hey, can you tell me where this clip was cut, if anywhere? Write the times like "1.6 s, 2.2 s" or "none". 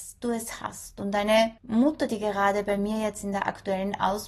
1.6 s